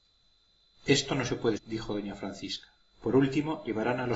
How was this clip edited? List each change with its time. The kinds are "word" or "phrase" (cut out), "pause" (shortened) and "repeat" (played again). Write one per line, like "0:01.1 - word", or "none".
0:01.6 - word
0:02.8 - pause

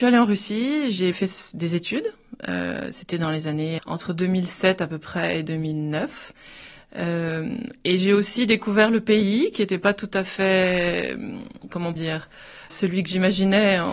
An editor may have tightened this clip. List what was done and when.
0:01.1 - word
0:03.8 - word
0:12.0 - word
0:12.7 - word

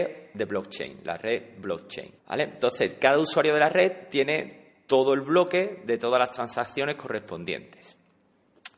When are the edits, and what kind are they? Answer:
0:02.2 - pause

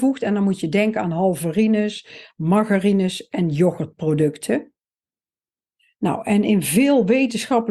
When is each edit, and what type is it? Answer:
none

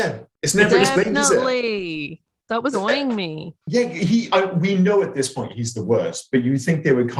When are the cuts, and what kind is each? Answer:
0:02.7 - word
0:03.6 - pause
0:04.3 - word

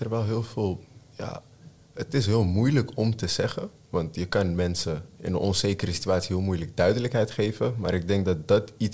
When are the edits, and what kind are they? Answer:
none

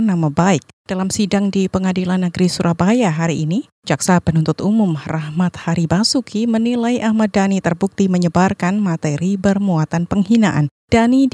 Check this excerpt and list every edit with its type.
none

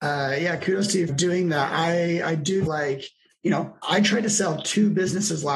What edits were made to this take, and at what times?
0:01.1 - phrase
0:02.7 - word
0:03.3 - word
0:03.8 - word

